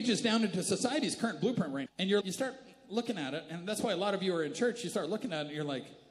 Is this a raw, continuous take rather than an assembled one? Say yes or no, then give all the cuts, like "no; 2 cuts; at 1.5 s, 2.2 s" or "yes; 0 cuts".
no; 2 cuts; at 1.9 s, 2.2 s